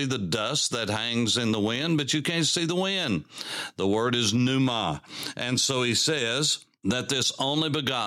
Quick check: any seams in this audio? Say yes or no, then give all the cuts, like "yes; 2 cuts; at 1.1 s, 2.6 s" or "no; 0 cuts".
no; 0 cuts